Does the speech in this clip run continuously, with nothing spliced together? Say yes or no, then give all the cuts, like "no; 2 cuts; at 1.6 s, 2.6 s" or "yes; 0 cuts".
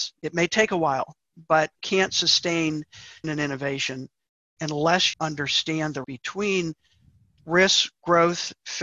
no; 4 cuts; at 1.8 s, 3.2 s, 5.1 s, 6.0 s